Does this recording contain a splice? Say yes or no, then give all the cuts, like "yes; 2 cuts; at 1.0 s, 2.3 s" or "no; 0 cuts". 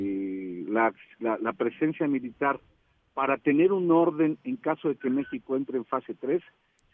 no; 0 cuts